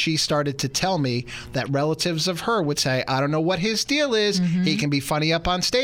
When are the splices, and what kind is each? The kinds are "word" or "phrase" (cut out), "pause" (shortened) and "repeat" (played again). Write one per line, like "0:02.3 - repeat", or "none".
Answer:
none